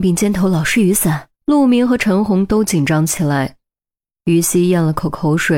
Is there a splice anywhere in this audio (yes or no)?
yes